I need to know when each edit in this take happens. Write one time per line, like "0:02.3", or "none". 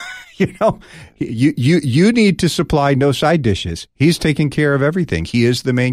none